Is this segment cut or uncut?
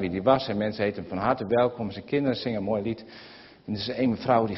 uncut